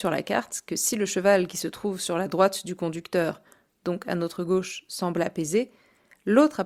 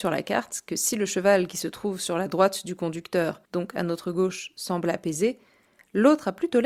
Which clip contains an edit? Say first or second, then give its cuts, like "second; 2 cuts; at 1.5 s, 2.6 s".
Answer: second; 1 cut; at 3.5 s